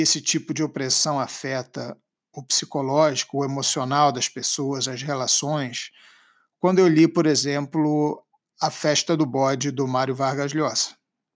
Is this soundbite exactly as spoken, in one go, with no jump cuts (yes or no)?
yes